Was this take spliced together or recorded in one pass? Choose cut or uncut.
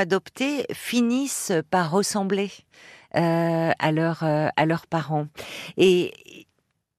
uncut